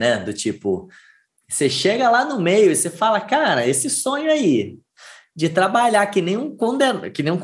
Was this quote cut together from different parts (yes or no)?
no